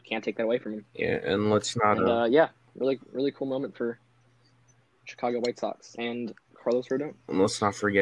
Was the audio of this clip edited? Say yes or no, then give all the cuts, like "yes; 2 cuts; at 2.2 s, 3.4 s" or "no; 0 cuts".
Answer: no; 0 cuts